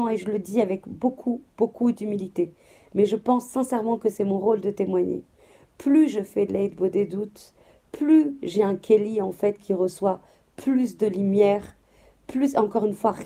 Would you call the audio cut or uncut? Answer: uncut